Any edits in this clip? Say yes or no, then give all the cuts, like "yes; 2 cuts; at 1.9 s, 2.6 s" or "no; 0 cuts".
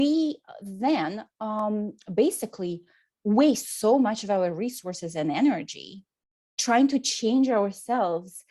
no; 0 cuts